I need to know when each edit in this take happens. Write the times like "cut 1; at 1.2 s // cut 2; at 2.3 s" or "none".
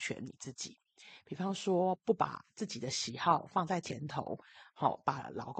none